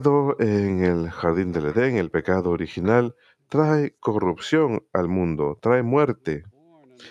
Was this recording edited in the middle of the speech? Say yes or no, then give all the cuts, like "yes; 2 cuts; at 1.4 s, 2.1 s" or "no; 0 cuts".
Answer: no; 0 cuts